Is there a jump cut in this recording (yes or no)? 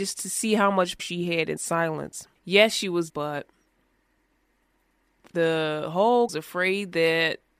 yes